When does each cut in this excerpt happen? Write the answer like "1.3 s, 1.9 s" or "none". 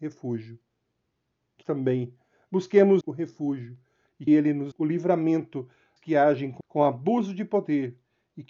1.6 s, 3.0 s, 4.3 s, 4.7 s, 6.0 s, 6.6 s